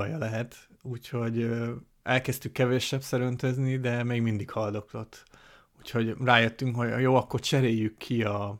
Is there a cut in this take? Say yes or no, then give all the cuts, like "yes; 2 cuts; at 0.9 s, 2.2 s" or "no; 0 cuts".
no; 0 cuts